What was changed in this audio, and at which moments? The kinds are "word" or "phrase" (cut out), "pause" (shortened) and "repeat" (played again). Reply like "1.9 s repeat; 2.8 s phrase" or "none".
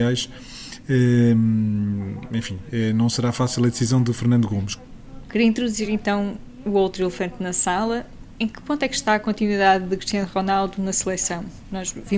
none